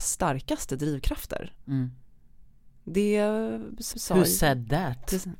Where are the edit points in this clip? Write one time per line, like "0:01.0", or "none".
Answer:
0:03.9